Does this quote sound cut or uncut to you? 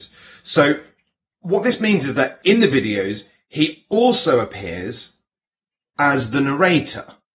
uncut